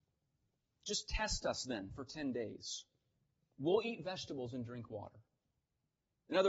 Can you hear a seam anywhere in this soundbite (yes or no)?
no